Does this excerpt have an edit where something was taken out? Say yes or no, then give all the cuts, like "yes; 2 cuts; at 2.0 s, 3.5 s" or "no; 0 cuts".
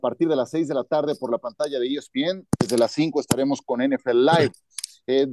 no; 0 cuts